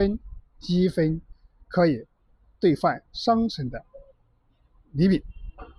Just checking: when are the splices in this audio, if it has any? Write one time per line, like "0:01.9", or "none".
none